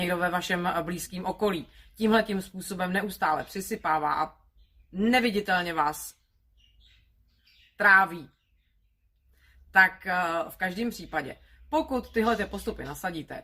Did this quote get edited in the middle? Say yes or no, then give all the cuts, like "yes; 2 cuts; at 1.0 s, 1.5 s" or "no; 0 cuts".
no; 0 cuts